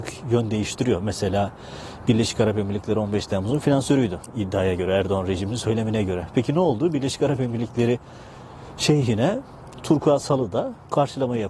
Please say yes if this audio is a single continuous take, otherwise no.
yes